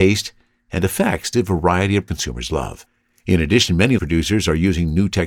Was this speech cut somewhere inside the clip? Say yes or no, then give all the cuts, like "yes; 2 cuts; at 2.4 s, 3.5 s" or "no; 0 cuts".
yes; 3 cuts; at 1.3 s, 2.1 s, 4.0 s